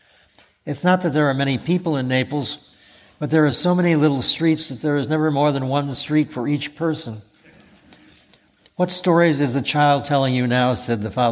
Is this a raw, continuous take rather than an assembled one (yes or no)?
yes